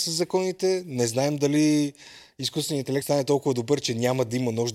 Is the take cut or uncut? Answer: cut